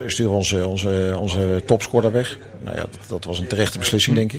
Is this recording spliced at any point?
no; 0 cuts

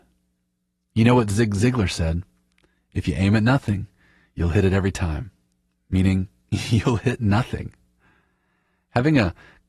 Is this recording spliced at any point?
no; 0 cuts

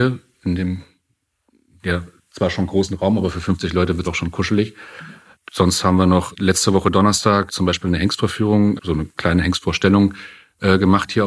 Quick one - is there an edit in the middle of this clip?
yes; 4 cuts; at 4.0 s, 6.3 s, 7.5 s, 8.8 s

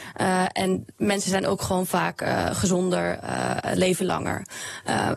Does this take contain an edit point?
no; 0 cuts

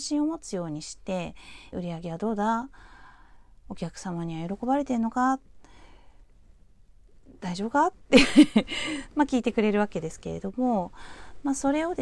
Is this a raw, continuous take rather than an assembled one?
no; 1 cut; at 1.7 s

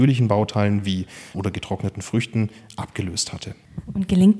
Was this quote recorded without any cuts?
no; 1 cut; at 1.3 s

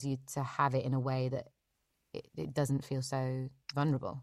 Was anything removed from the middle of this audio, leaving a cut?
no; 0 cuts

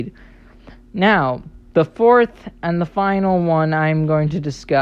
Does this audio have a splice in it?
no; 0 cuts

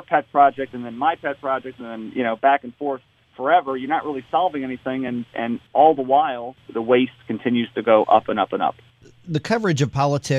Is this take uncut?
yes; 0 cuts

